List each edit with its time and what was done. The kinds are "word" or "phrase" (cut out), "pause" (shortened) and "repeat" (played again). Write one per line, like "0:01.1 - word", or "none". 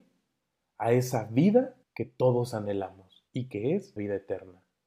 0:01.8 - pause
0:03.3 - pause
0:04.0 - word